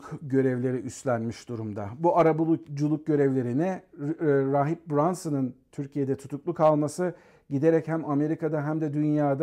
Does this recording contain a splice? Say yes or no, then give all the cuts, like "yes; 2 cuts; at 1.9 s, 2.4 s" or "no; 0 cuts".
no; 0 cuts